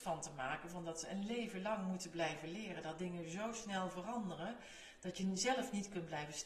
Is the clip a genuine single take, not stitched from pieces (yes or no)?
yes